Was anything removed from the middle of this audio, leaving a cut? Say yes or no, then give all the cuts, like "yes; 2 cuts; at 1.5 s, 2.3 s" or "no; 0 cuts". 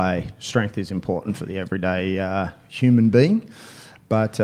no; 0 cuts